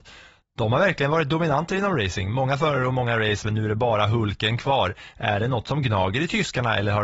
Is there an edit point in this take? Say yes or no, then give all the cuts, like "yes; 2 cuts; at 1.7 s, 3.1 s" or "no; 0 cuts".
no; 0 cuts